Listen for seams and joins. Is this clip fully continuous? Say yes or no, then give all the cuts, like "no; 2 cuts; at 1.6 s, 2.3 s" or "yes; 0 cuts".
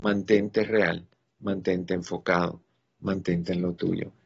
yes; 0 cuts